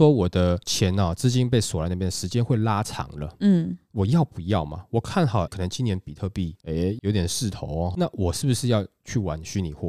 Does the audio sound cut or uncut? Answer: cut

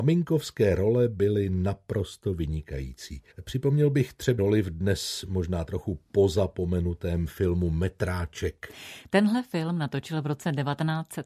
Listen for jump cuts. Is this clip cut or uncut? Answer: cut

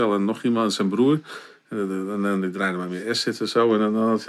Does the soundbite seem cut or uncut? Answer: uncut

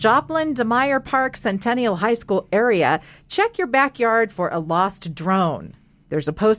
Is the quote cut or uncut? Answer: uncut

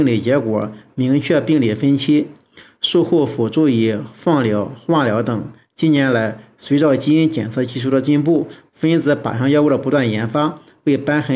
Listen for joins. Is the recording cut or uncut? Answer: uncut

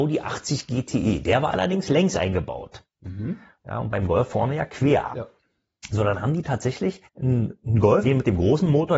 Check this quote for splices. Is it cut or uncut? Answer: cut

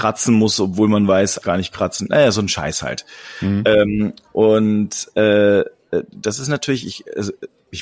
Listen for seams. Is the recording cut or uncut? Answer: cut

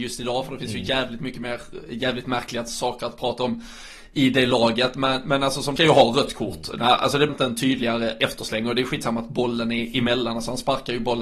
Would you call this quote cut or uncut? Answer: cut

